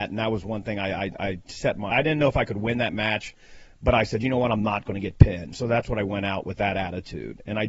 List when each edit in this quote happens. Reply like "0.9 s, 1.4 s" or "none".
1.9 s